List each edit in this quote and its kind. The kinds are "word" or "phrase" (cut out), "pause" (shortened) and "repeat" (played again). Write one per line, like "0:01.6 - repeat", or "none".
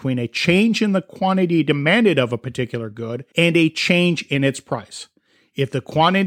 0:03.3 - pause